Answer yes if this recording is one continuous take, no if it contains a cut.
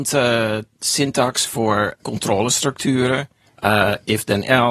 no